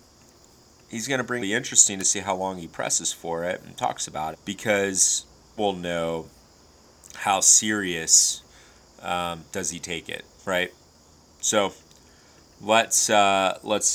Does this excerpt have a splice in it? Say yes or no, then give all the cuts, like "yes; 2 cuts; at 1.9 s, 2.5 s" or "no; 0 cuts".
yes; 4 cuts; at 1.4 s, 4.3 s, 5.6 s, 10.3 s